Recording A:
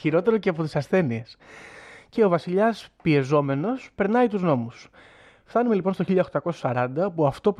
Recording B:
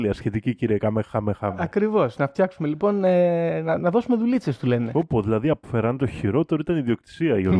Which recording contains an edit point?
B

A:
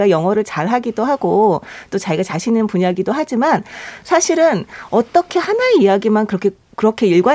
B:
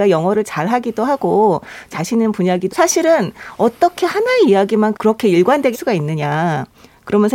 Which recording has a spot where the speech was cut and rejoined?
B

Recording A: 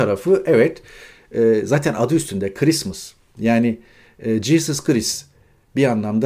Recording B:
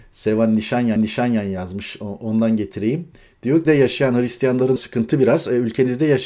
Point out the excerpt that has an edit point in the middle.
B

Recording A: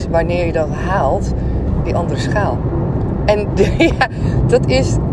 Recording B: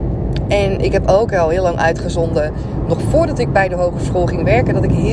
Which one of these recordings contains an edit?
A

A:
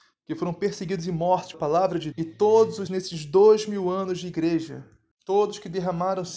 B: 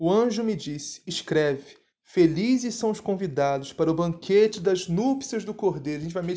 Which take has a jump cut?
A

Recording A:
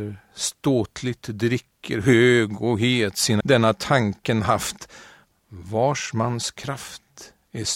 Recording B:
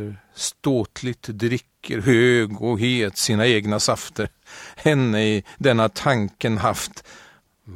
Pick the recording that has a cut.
A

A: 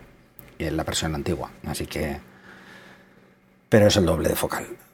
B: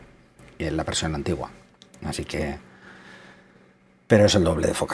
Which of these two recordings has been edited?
A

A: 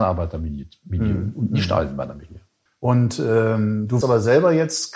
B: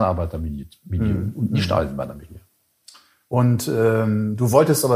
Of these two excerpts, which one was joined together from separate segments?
A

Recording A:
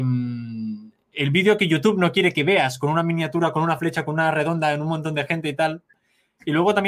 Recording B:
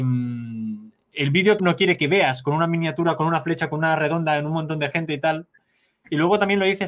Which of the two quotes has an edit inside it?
B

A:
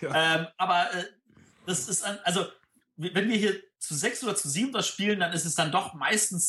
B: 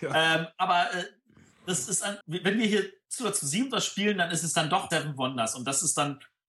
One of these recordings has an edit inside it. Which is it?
B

